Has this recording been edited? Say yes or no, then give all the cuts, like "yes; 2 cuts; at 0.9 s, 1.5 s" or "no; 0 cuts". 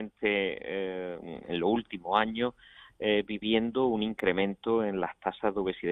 no; 0 cuts